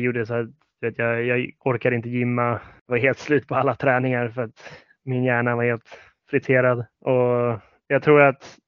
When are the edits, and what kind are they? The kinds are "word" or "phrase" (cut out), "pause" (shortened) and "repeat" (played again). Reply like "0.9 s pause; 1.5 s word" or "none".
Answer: none